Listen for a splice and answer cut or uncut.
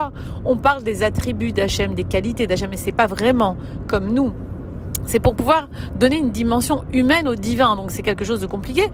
uncut